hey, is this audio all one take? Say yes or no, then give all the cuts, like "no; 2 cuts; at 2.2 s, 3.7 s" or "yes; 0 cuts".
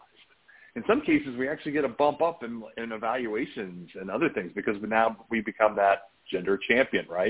yes; 0 cuts